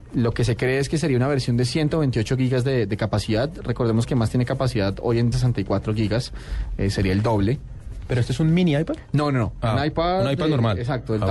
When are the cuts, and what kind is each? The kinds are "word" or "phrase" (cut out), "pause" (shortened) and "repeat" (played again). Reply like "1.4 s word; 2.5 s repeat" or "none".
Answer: 4.0 s phrase; 5.3 s phrase